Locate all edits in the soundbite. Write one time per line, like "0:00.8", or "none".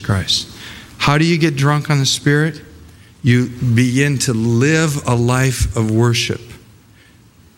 none